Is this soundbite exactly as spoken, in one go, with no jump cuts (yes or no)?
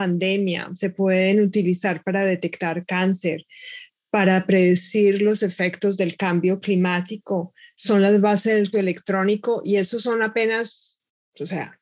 no